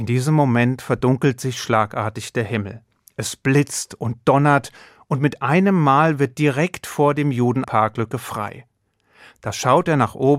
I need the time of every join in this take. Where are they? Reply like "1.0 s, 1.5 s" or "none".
7.6 s